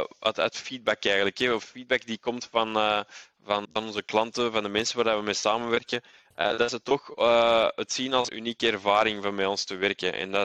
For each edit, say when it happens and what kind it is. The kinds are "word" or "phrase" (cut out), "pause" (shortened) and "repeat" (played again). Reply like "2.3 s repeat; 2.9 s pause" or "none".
3.6 s word; 8.3 s word